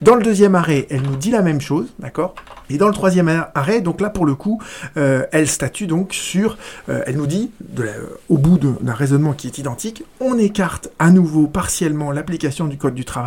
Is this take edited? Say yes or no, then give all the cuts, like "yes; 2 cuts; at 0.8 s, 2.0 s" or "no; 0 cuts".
yes; 1 cut; at 2.6 s